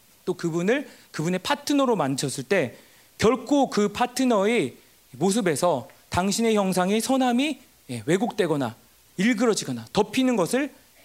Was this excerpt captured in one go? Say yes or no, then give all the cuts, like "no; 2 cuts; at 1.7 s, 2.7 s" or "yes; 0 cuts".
yes; 0 cuts